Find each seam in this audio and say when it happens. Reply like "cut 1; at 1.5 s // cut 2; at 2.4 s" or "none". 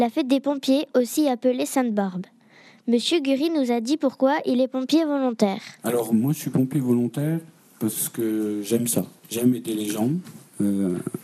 cut 1; at 5.8 s